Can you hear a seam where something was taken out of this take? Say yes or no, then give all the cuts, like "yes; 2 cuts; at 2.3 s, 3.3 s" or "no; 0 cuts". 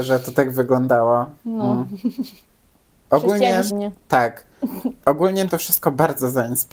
yes; 2 cuts; at 3.7 s, 5.5 s